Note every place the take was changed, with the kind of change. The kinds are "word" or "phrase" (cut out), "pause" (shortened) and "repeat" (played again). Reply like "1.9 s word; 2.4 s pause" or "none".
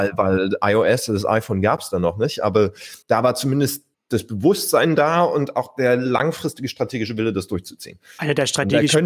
3.0 s pause; 3.9 s pause